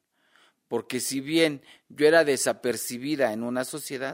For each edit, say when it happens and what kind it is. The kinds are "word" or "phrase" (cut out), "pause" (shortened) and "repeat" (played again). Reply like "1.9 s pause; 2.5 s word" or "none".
none